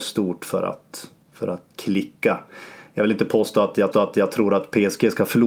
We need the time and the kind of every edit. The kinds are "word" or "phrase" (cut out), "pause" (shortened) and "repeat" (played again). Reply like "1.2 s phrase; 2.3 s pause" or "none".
1.2 s pause; 1.7 s word; 3.9 s repeat

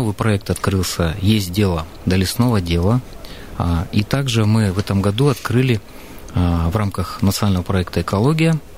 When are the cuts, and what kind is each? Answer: none

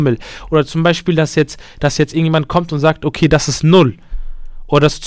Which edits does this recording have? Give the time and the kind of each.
none

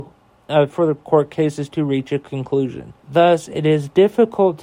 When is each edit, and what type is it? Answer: 3.0 s pause

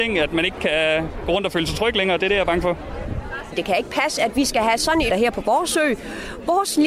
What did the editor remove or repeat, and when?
5.1 s word

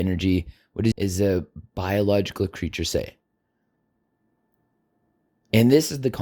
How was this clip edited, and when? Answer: 0.9 s word

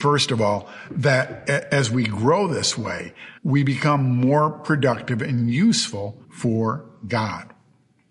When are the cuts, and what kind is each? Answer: 3.4 s pause; 6.2 s pause

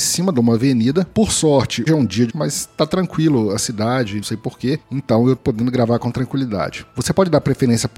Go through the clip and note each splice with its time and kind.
1.9 s word; 2.3 s word; 4.2 s word; 5.4 s word

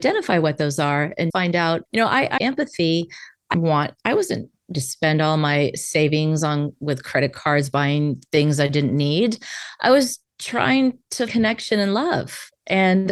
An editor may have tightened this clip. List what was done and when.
1.3 s word; 1.9 s pause; 2.4 s phrase; 3.5 s word; 4.7 s phrase; 11.3 s word

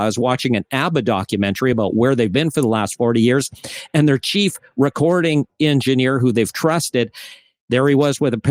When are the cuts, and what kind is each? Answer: none

